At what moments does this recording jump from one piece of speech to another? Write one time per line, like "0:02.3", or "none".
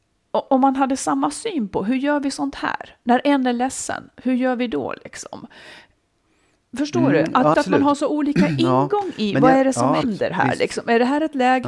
0:07.5
0:10.0